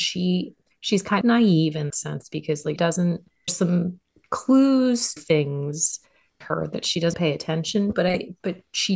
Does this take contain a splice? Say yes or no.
yes